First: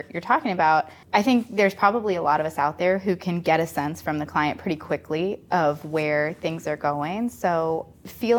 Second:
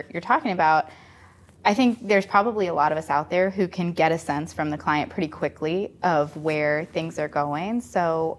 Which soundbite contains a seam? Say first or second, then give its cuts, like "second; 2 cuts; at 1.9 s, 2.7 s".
first; 1 cut; at 1.0 s